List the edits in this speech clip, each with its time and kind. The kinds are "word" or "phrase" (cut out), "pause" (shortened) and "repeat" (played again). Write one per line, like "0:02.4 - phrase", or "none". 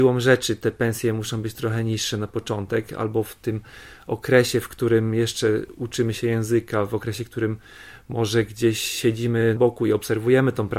0:09.6 - word